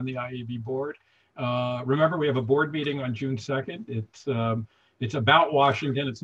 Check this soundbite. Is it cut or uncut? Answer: uncut